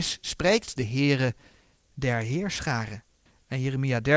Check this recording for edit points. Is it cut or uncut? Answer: uncut